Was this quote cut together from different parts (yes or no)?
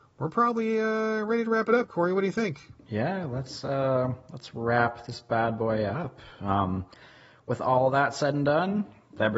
no